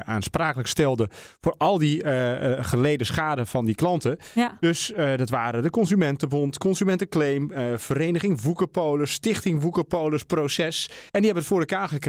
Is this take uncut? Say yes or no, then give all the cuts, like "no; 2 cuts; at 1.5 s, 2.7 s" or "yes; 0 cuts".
no; 1 cut; at 11.1 s